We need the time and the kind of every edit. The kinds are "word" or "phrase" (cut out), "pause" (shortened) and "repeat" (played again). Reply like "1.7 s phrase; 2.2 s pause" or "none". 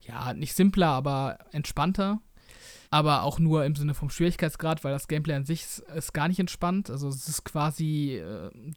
2.8 s pause